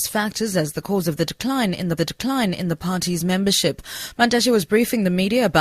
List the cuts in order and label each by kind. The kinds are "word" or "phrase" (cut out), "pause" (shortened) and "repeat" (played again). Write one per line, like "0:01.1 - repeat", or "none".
0:02.0 - repeat